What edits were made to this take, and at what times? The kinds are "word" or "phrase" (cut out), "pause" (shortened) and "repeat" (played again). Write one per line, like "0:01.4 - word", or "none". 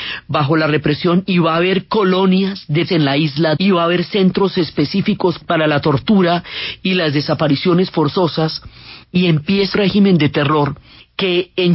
0:02.9 - word
0:03.6 - word
0:09.0 - pause
0:09.7 - word